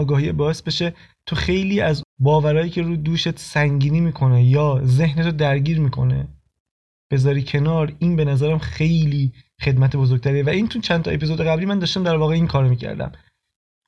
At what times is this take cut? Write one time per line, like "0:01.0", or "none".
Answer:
0:02.0

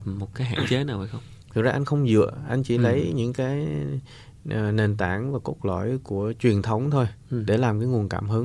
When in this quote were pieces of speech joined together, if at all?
none

